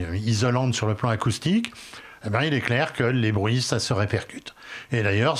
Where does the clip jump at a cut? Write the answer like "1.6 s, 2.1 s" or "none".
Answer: none